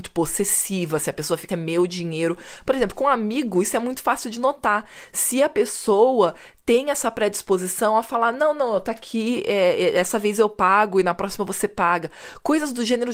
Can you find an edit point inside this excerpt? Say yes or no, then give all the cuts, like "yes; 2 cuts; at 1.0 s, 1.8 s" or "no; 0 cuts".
yes; 1 cut; at 1.5 s